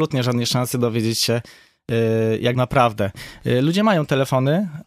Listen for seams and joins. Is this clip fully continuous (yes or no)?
no